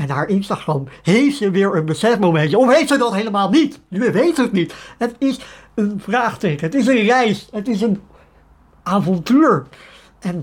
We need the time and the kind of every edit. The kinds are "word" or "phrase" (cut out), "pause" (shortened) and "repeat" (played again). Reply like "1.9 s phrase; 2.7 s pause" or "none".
none